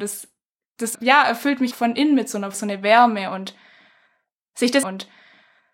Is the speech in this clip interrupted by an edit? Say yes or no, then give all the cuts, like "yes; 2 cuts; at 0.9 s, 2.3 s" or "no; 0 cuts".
yes; 4 cuts; at 0.9 s, 1.7 s, 2.5 s, 4.8 s